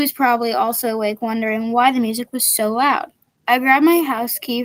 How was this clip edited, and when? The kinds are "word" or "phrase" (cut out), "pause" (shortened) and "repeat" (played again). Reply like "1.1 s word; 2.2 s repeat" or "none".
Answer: none